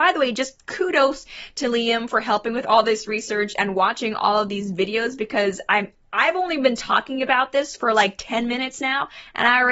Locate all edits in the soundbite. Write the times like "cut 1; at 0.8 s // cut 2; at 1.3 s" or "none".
none